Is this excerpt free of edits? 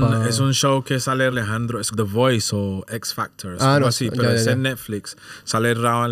no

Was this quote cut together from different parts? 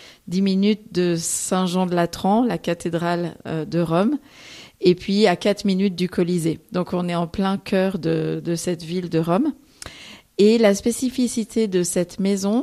no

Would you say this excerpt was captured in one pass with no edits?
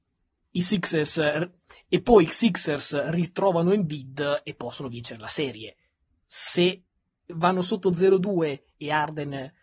yes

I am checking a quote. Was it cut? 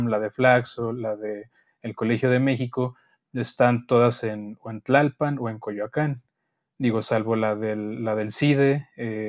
no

